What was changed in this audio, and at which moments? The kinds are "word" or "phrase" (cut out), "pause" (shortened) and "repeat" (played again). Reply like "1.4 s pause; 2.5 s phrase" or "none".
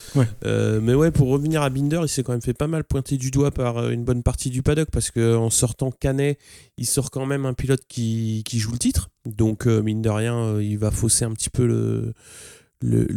none

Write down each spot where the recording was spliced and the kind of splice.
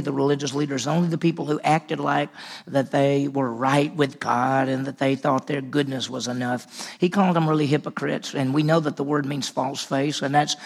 none

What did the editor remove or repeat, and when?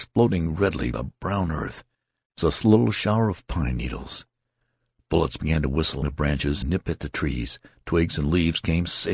0.9 s word; 2.4 s word; 6.0 s word; 6.6 s word

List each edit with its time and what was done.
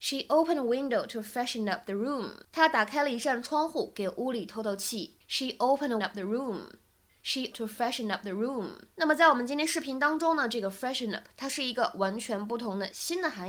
2.4 s pause; 5.2 s pause; 6.0 s phrase; 7.5 s phrase; 8.9 s pause

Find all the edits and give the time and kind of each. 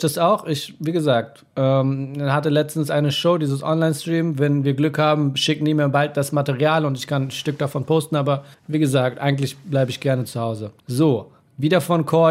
8.5 s pause; 10.8 s pause

